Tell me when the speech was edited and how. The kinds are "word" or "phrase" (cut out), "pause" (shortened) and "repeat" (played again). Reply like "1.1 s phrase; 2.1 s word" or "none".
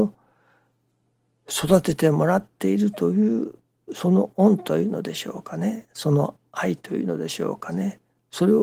none